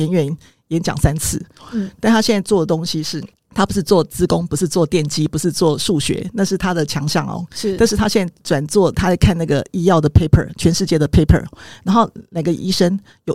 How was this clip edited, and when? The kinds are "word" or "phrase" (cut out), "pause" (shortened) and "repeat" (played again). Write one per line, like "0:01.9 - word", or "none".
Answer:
0:08.4 - pause